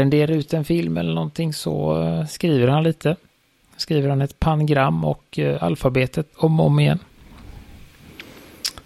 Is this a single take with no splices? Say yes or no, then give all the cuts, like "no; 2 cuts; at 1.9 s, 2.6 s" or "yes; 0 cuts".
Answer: yes; 0 cuts